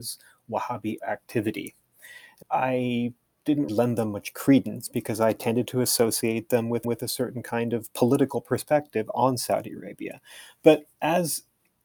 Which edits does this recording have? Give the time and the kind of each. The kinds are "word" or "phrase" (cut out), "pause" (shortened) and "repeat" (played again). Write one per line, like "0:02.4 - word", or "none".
0:01.0 - word
0:02.4 - phrase
0:03.7 - word
0:06.8 - repeat